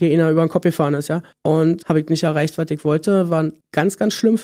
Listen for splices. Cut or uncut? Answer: uncut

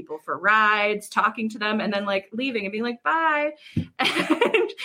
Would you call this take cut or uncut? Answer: uncut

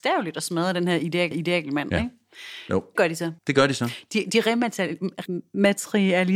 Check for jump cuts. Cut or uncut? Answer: cut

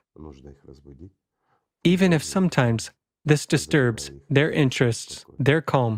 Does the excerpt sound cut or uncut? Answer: uncut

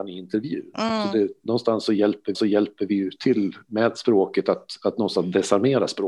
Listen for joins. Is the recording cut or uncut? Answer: cut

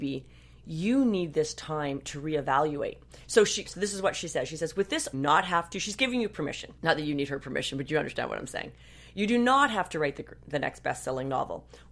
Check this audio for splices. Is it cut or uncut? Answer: cut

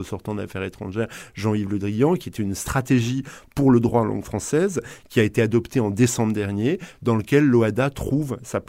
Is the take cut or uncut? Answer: uncut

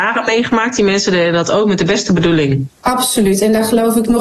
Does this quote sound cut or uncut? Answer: cut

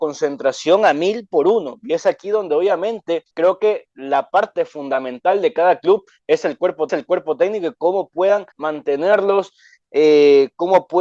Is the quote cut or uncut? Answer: cut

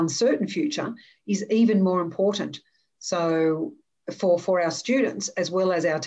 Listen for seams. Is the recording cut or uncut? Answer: uncut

